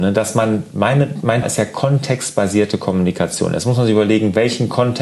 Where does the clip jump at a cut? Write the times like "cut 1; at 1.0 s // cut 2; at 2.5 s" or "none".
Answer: cut 1; at 1.4 s